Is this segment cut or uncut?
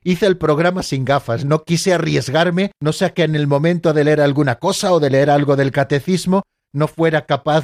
cut